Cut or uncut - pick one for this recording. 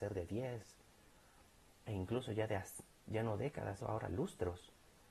cut